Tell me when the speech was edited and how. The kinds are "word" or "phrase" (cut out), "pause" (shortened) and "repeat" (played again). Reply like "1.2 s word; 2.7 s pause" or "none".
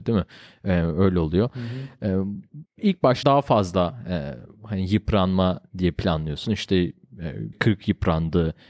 2.7 s pause; 3.2 s word; 7.5 s word